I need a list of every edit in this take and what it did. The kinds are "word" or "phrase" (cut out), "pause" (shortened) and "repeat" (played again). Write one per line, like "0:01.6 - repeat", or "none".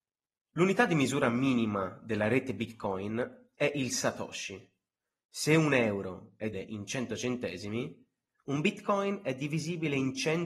0:06.5 - word